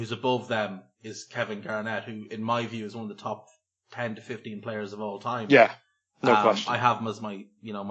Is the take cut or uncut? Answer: uncut